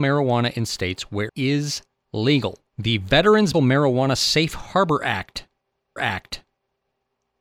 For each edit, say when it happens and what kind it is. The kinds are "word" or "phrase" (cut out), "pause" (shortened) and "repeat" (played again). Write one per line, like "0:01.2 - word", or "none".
0:01.3 - word
0:02.7 - pause
0:03.5 - word
0:06.0 - repeat